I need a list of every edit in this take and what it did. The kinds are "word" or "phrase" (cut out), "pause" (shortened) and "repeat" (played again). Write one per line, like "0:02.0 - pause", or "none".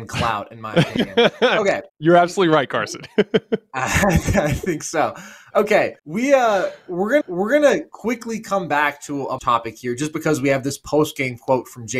0:01.9 - pause
0:06.0 - pause
0:07.2 - repeat
0:09.4 - phrase

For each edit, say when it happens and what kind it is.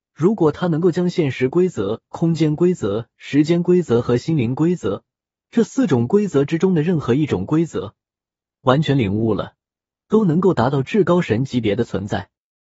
none

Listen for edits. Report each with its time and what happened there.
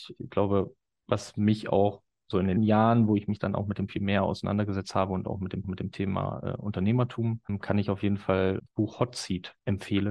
0:02.6 - word
0:03.9 - phrase
0:05.6 - repeat
0:08.7 - word

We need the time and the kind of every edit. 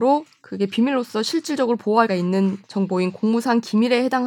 0:02.1 - word
0:02.6 - pause

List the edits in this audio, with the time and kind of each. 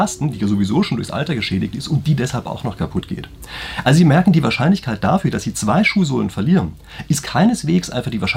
none

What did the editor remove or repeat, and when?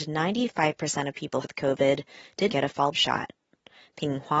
0:01.4 - word
0:02.5 - word
0:02.9 - word

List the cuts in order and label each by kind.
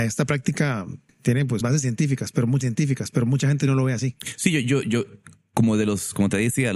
0:01.6 - word
0:02.6 - repeat

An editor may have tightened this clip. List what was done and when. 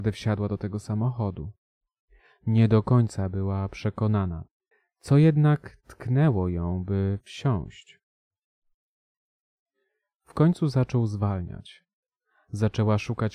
0:04.7 - pause

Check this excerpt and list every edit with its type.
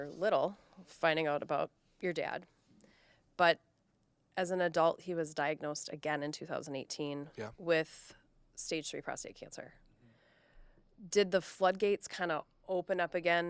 none

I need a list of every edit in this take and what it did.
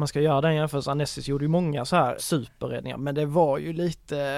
0:02.2 - word

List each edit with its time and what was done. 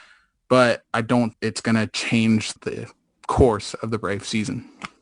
0:01.3 - word
0:02.6 - word

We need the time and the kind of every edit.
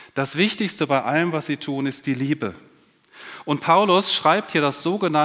none

